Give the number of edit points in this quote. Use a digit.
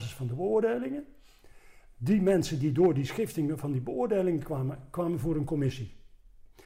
0